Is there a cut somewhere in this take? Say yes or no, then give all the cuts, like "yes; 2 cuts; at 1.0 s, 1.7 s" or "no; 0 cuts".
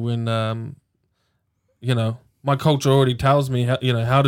no; 0 cuts